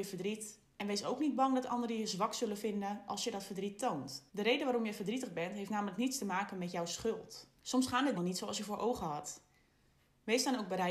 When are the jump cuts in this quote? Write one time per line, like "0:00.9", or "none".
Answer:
0:04.3
0:07.6
0:08.1